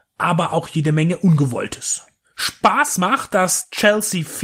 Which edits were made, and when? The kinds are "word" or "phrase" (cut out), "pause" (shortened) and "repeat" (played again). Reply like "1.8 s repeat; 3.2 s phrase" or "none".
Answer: none

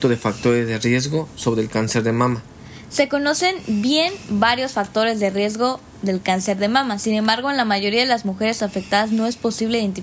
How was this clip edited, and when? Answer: none

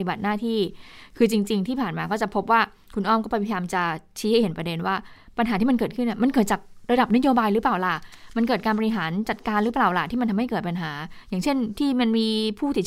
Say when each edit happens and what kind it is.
none

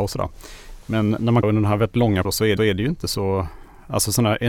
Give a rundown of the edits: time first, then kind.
1.4 s word; 2.2 s word; 2.6 s repeat

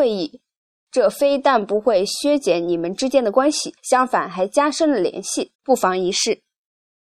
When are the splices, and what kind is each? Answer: 3.8 s pause; 5.5 s pause

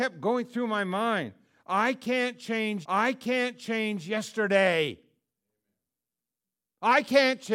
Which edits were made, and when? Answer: 2.8 s repeat

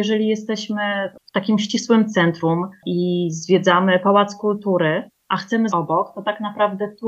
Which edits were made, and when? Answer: 1.2 s pause; 5.2 s pause; 5.7 s phrase

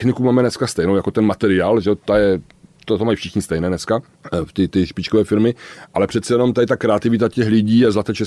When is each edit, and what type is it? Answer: none

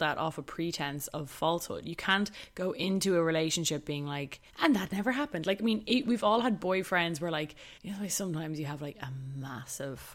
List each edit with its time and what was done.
4.5 s pause; 7.8 s pause

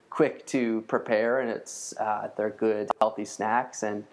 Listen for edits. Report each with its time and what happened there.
none

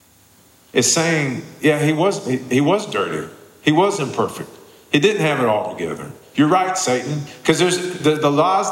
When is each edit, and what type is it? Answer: none

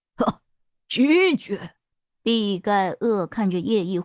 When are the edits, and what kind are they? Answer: 1.9 s pause

